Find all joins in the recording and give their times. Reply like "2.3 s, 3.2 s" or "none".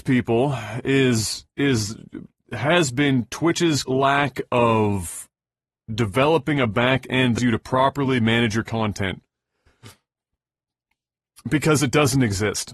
3.8 s, 7.4 s